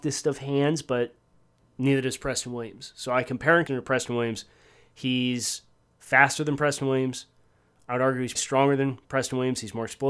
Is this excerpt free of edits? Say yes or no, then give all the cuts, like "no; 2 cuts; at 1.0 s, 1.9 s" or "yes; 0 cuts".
no; 2 cuts; at 3.7 s, 8.3 s